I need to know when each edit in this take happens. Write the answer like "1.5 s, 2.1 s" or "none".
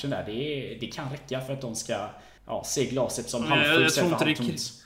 2.4 s